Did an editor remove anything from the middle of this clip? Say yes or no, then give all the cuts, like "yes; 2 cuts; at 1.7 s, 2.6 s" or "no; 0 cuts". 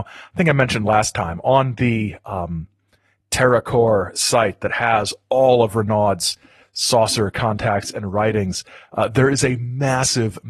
no; 0 cuts